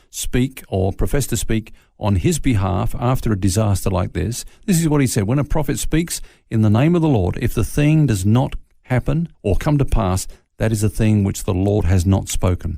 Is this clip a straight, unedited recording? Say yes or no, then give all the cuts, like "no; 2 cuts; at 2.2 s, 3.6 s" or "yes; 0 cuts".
no; 1 cut; at 9.3 s